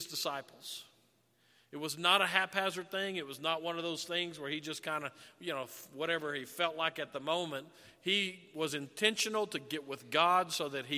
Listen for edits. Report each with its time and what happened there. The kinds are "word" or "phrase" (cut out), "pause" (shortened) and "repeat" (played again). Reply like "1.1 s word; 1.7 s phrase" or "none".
none